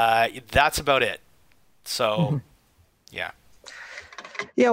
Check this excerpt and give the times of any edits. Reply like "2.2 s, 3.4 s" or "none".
none